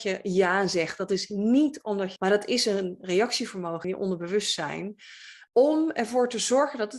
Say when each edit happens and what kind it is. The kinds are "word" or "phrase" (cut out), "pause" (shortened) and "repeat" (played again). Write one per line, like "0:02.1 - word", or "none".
0:02.2 - phrase
0:03.8 - phrase
0:05.5 - word